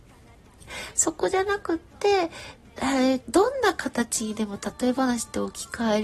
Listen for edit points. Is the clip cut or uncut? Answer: cut